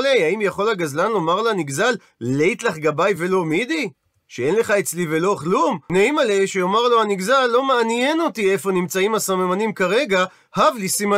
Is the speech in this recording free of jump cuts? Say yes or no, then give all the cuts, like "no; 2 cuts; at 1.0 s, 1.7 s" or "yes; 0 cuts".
yes; 0 cuts